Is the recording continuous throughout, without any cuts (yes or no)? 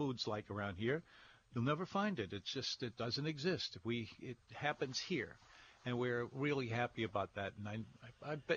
yes